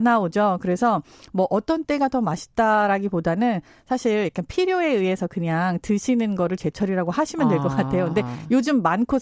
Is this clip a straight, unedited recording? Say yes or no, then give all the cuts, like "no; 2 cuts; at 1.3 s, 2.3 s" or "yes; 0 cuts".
yes; 0 cuts